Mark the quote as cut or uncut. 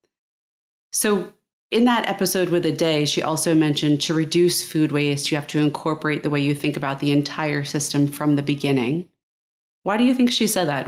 uncut